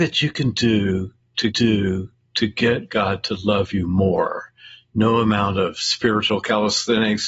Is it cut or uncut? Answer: cut